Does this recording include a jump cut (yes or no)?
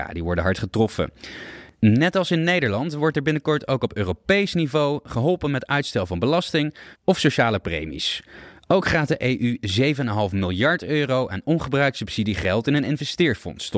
yes